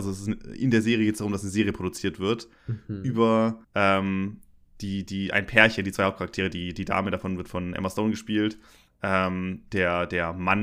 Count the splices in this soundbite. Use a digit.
2